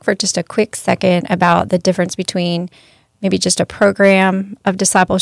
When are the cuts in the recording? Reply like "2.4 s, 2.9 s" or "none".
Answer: none